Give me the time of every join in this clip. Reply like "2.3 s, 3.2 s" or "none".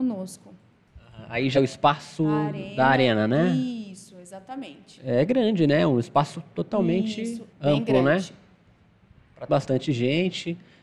1.5 s, 7.5 s, 9.5 s